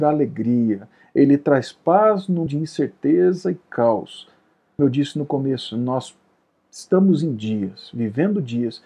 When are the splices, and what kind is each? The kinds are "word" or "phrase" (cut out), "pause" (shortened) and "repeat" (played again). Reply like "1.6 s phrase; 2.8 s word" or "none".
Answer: 2.5 s word; 4.8 s word